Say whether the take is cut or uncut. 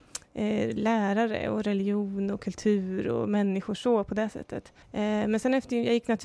cut